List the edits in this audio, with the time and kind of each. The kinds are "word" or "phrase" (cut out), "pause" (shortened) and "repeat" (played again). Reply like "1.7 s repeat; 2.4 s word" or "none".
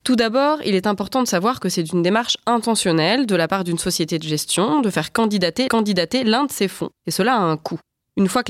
5.7 s repeat; 7.0 s pause